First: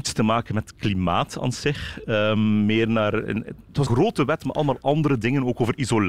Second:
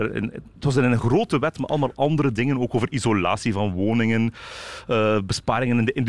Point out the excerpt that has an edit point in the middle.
first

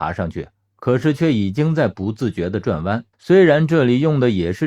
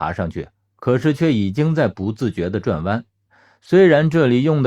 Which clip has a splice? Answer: first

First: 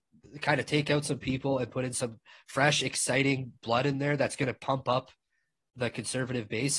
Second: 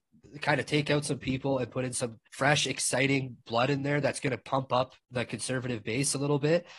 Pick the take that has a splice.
second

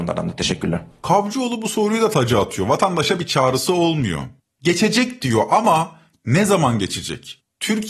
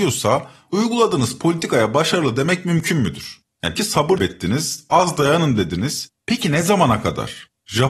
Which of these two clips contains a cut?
second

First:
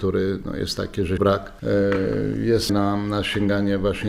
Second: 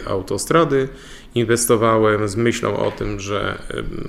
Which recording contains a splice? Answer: first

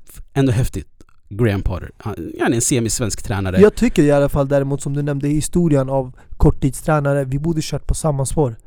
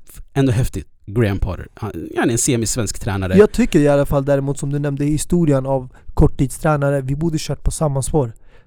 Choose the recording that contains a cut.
second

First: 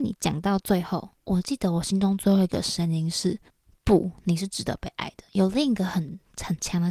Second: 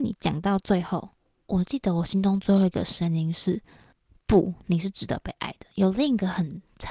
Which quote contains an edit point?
first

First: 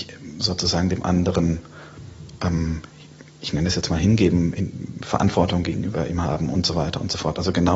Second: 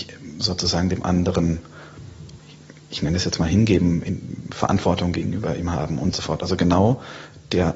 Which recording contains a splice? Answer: second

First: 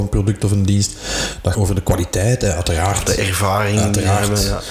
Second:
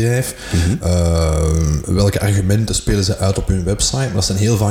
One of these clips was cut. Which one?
first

